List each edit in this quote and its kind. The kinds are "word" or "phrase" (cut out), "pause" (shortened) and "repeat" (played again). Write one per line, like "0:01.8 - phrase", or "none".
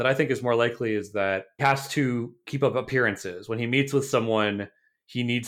0:01.6 - word

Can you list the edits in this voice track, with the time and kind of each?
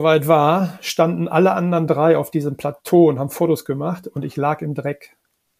none

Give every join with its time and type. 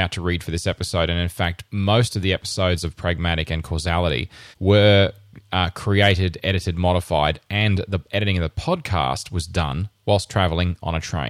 0:01.7 - pause
0:04.5 - pause

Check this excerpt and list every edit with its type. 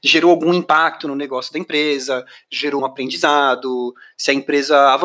0:02.8 - word

